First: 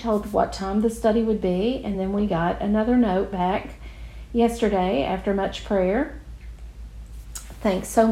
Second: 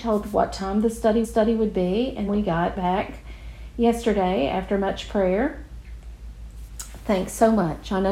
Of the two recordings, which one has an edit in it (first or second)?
second